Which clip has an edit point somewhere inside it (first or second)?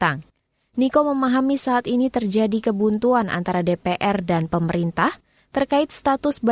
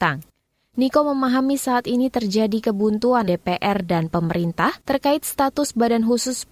second